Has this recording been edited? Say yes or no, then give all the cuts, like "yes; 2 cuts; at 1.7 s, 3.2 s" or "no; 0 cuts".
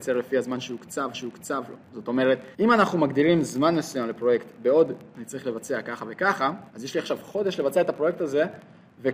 yes; 4 cuts; at 1.1 s, 2.5 s, 5.1 s, 6.7 s